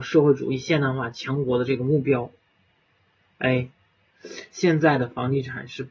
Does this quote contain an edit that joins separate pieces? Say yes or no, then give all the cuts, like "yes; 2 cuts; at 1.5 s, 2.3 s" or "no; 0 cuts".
no; 0 cuts